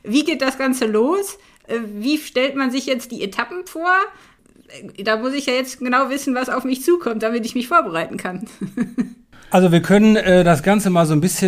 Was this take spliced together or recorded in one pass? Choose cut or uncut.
uncut